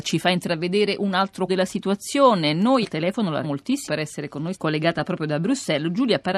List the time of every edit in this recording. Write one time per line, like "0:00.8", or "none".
0:01.5
0:02.8
0:03.4
0:03.9
0:04.5

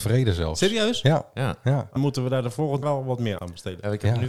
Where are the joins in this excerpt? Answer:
0:02.0
0:02.8
0:03.4

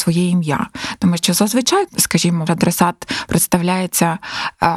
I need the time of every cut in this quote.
0:01.9
0:02.5

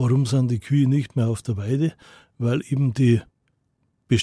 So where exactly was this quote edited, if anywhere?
none

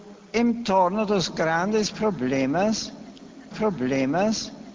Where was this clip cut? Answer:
0:03.5

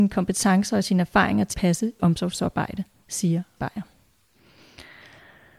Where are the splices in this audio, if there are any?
0:01.5
0:02.0
0:03.6

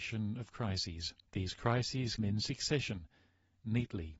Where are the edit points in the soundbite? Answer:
0:01.2
0:02.2

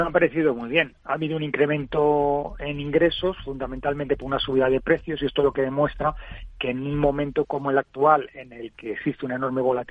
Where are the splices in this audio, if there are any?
none

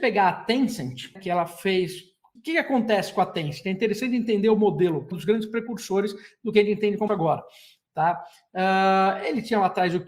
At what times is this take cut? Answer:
0:01.2
0:02.4
0:05.1
0:07.1

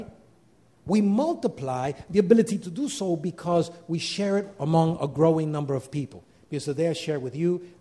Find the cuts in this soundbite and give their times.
none

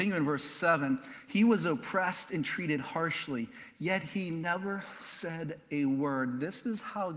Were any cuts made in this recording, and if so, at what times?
none

